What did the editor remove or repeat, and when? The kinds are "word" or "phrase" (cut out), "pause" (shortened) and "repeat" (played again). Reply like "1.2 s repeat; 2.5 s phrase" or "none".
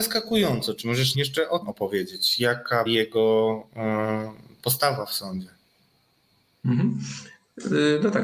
1.1 s word; 1.6 s word; 2.9 s word